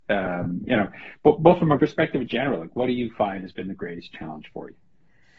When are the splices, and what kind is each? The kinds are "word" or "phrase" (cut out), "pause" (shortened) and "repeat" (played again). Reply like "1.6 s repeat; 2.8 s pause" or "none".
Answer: 1.8 s word; 2.3 s word